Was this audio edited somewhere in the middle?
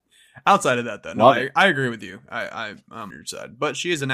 yes; 1 cut; at 3.1 s

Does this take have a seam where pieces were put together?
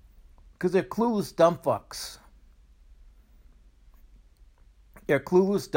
no; 0 cuts

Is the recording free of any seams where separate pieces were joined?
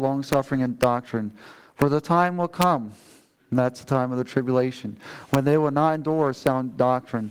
yes; 0 cuts

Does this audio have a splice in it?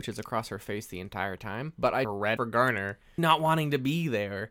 yes; 3 cuts; at 2.0 s, 2.4 s, 3.2 s

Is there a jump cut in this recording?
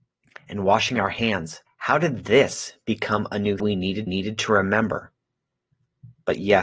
yes; 3 cuts; at 1.7 s, 3.6 s, 4.1 s

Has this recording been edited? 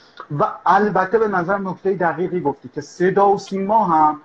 no; 0 cuts

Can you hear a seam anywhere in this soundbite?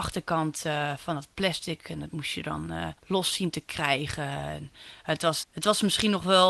yes; 2 cuts; at 3.0 s, 5.4 s

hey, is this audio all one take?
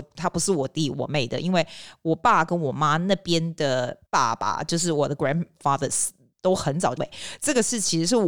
no; 2 cuts; at 4.1 s, 7.0 s

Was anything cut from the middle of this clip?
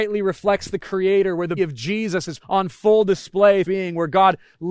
yes; 3 cuts; at 1.6 s, 2.4 s, 3.6 s

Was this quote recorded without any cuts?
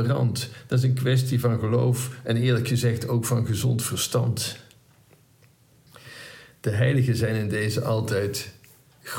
yes; 0 cuts

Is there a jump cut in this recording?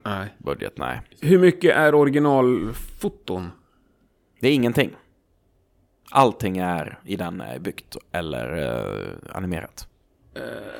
yes; 1 cut; at 1.1 s

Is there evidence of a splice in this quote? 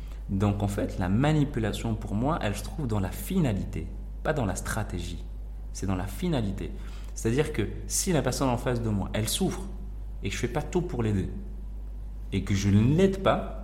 no; 0 cuts

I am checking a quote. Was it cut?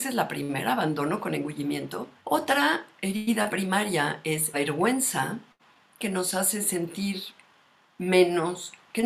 yes; 3 cuts; at 2.2 s, 4.5 s, 6.0 s

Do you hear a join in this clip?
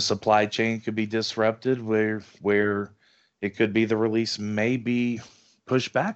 no; 0 cuts

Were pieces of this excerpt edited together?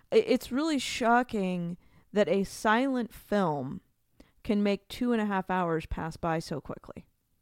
no; 0 cuts

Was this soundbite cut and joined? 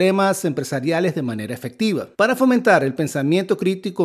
yes; 1 cut; at 2.1 s

